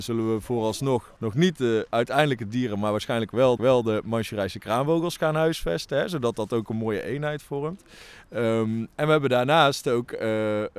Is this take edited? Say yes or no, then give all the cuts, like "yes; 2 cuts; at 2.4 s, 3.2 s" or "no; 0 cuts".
yes; 2 cuts; at 1.2 s, 3.6 s